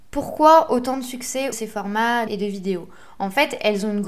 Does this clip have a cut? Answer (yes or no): yes